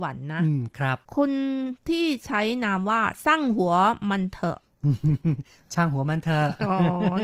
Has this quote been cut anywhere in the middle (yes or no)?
yes